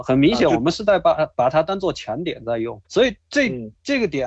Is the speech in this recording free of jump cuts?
no; 1 cut; at 2.8 s

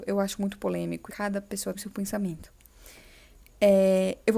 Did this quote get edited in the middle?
yes; 2 cuts; at 1.1 s, 1.7 s

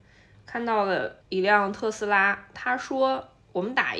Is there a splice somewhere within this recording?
yes; 1 cut; at 1.2 s

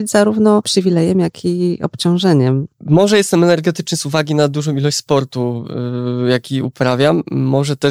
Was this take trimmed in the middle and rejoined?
yes; 1 cut; at 2.7 s

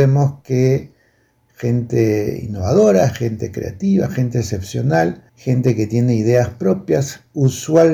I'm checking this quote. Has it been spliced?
yes; 1 cut; at 5.3 s

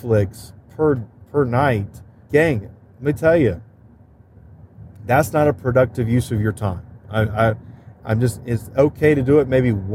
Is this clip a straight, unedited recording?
no; 3 cuts; at 2.2 s, 4.9 s, 8.0 s

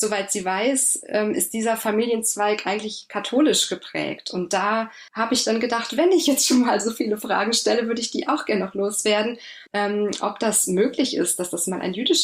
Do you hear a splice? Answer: yes; 2 cuts; at 5.1 s, 9.7 s

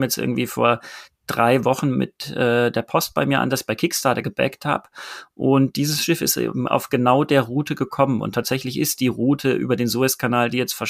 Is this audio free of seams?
yes; 0 cuts

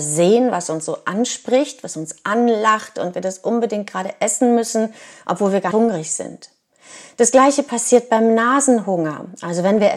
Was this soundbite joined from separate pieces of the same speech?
yes; 1 cut; at 5.7 s

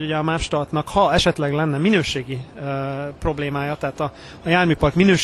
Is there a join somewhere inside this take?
no; 0 cuts

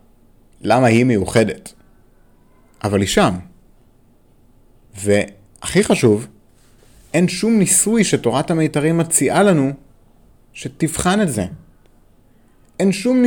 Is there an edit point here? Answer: no; 0 cuts

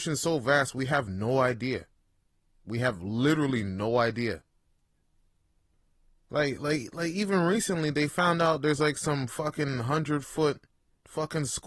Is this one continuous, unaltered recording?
yes; 0 cuts

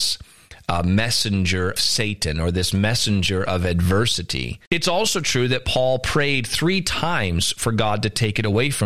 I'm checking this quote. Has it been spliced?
yes; 2 cuts; at 1.8 s, 4.7 s

